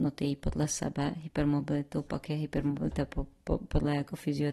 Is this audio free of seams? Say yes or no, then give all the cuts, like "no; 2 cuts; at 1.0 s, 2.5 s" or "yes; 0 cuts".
yes; 0 cuts